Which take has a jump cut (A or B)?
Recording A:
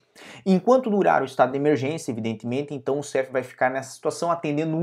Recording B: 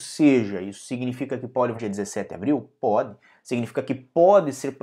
B